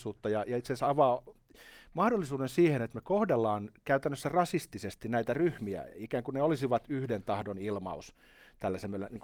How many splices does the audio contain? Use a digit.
0